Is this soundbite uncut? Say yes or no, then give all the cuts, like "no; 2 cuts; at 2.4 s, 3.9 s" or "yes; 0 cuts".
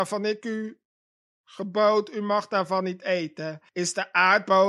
no; 1 cut; at 3.7 s